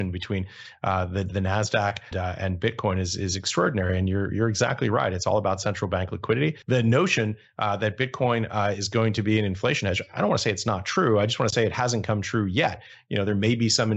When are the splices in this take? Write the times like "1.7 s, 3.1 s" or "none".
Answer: 2.1 s, 6.6 s